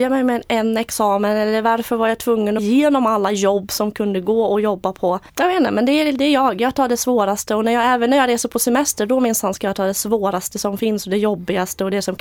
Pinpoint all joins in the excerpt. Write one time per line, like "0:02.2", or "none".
0:02.6
0:05.3

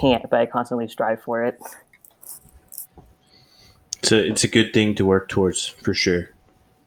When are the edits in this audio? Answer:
none

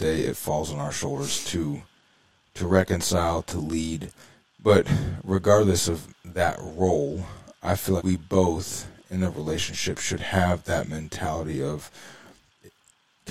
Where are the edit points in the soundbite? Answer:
0:04.3
0:06.2
0:08.0

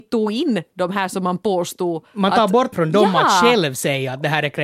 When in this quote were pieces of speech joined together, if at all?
0:02.7

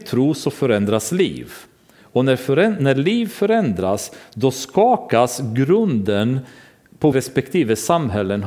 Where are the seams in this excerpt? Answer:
0:07.1

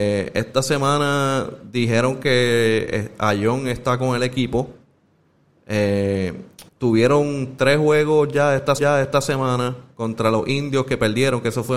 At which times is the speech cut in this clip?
0:06.7
0:08.8

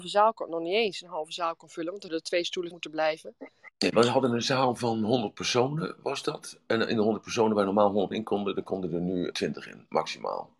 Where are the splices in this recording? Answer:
0:02.1
0:02.7
0:08.1
0:09.3

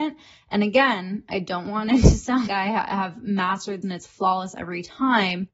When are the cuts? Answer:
0:02.5
0:03.8

